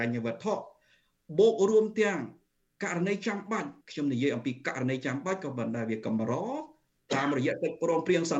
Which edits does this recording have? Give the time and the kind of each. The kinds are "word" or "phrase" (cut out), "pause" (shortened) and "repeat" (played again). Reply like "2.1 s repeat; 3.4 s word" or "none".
3.8 s pause